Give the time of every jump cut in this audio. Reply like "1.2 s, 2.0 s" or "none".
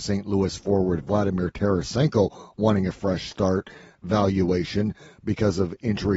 none

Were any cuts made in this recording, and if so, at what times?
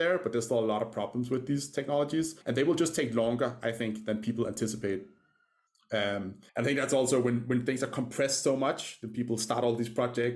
2.4 s, 6.5 s

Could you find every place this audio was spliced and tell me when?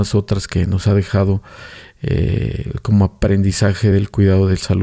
none

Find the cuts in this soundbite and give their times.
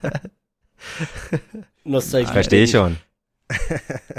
none

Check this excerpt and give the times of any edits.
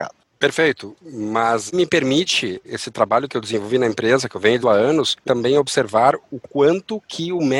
1.7 s, 3.3 s, 4.6 s, 5.2 s

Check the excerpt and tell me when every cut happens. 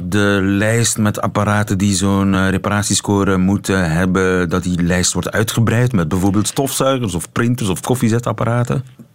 none

